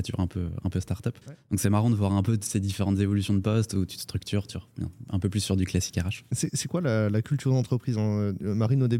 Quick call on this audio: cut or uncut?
cut